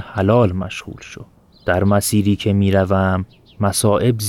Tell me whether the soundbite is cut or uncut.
uncut